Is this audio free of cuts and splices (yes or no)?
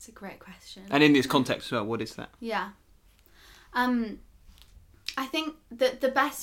yes